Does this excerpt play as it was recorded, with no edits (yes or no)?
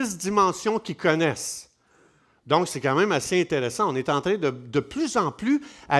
yes